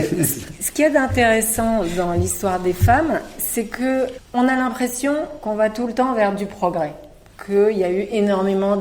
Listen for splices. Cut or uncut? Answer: cut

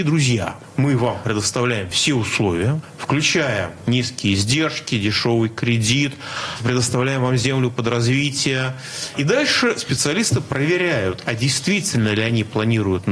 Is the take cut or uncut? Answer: uncut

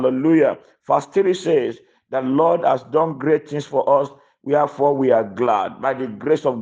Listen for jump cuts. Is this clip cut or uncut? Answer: uncut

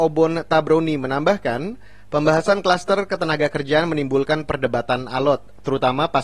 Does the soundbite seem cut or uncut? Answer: uncut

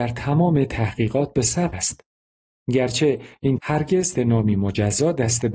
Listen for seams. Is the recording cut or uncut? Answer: cut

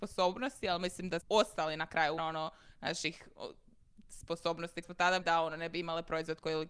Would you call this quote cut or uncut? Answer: cut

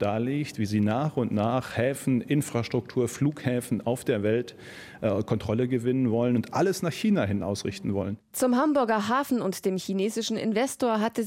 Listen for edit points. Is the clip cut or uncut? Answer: uncut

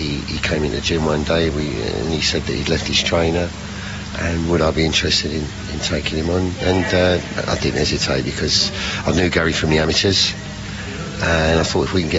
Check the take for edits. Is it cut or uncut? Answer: uncut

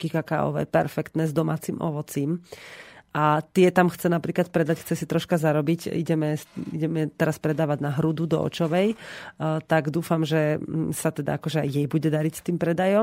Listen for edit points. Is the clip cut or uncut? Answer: uncut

